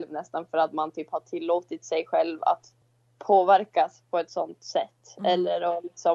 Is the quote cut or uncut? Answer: uncut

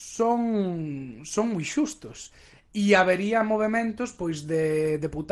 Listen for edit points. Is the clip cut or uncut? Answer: uncut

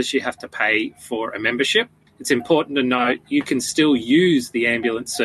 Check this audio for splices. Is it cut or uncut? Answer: uncut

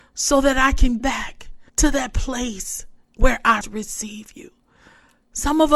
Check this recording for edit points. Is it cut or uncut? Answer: cut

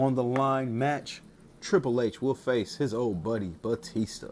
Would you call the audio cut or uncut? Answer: uncut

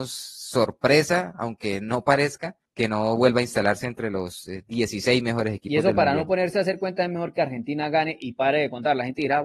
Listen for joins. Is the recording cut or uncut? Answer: cut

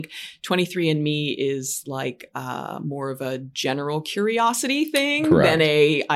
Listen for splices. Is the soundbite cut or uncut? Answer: uncut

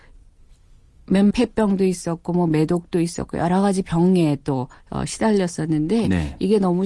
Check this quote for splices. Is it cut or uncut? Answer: cut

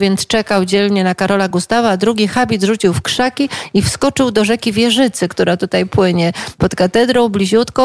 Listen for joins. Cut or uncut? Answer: uncut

